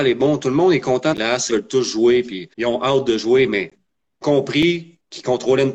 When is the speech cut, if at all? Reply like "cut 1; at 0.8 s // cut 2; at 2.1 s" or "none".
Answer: cut 1; at 1.1 s // cut 2; at 1.5 s // cut 3; at 2.5 s // cut 4; at 4.2 s